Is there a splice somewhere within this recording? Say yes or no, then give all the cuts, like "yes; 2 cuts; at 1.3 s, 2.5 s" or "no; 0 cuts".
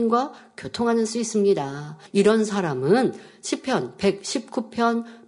yes; 2 cuts; at 1.1 s, 2.1 s